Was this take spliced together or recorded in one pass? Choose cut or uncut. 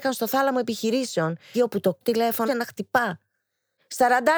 cut